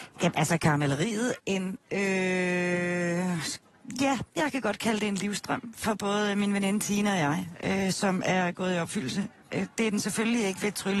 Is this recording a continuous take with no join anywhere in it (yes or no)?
no